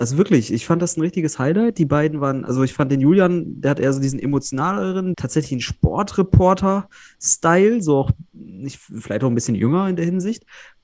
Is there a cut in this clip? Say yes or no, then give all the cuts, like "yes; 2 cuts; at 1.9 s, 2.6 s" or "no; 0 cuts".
yes; 1 cut; at 5.1 s